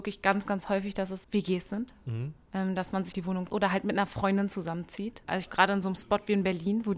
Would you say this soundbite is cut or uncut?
cut